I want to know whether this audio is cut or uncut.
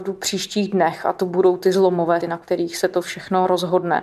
cut